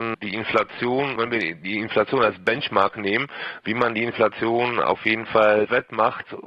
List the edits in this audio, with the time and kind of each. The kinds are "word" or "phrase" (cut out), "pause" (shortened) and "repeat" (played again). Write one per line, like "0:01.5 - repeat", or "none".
0:01.2 - word